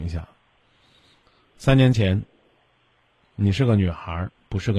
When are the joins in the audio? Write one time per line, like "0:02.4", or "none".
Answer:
none